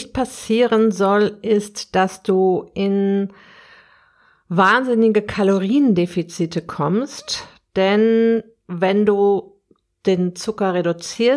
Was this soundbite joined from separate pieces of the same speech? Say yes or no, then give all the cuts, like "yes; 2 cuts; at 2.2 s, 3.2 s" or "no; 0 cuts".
no; 0 cuts